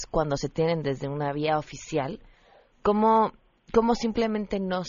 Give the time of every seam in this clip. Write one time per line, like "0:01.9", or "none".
none